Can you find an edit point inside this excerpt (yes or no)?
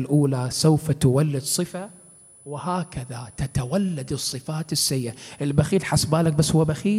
no